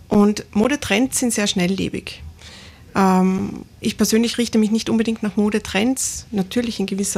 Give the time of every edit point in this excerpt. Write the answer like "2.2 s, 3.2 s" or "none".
none

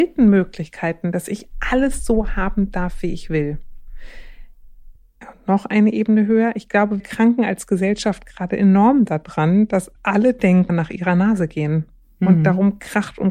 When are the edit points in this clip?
5.0 s, 7.0 s, 10.0 s, 10.7 s

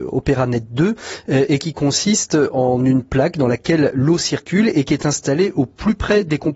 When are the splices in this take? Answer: none

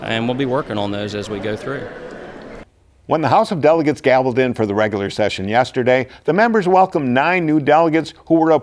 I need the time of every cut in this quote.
none

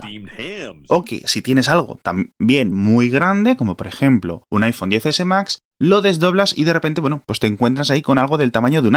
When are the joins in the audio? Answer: none

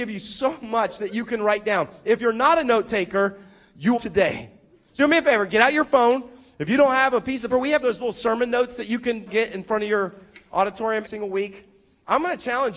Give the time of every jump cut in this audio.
3.9 s, 5.0 s, 7.5 s, 9.3 s, 11.0 s

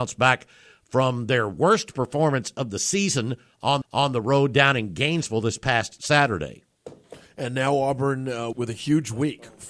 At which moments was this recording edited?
3.8 s, 8.5 s

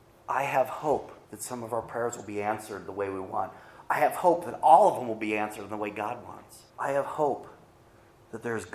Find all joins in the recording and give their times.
1.2 s, 6.7 s

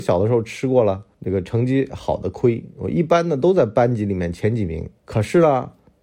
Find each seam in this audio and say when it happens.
1.1 s, 5.0 s

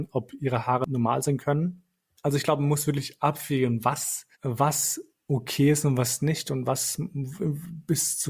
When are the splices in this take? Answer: 4.3 s

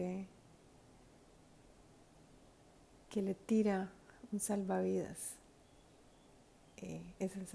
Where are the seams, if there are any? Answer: none

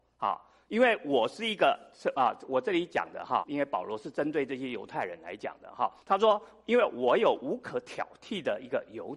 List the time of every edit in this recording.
3.4 s, 6.0 s

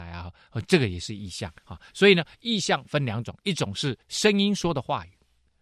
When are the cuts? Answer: 1.6 s, 4.0 s

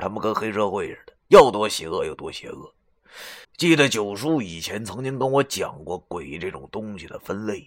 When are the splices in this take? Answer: 3.4 s

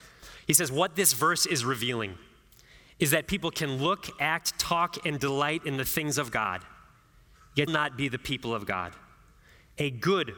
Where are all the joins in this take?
7.7 s

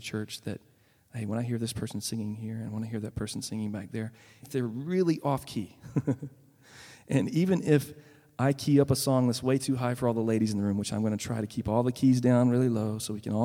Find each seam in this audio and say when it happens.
4.4 s

